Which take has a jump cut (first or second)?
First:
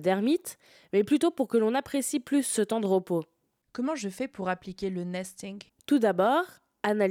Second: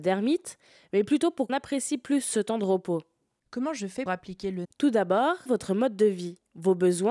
second